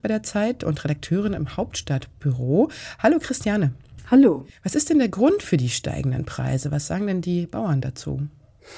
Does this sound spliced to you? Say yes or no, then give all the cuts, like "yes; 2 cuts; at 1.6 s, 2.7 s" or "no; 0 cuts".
no; 0 cuts